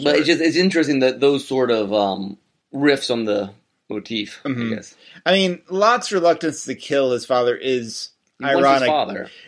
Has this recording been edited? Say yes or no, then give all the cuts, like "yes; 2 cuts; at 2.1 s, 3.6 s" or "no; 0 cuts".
no; 0 cuts